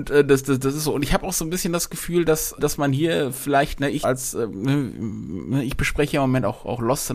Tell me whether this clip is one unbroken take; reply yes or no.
no